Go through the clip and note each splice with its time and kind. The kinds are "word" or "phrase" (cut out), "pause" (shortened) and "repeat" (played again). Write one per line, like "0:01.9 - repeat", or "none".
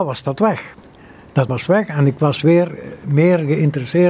0:01.5 - word